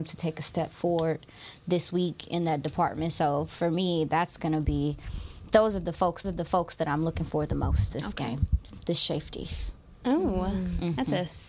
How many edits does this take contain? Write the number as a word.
one